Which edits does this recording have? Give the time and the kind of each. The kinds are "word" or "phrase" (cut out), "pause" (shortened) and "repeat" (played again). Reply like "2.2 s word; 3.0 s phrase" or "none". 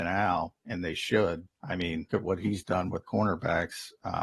1.5 s word; 2.1 s word; 3.0 s word